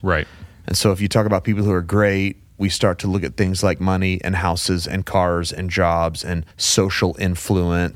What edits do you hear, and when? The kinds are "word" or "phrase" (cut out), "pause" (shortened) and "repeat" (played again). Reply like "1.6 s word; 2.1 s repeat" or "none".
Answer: 6.5 s pause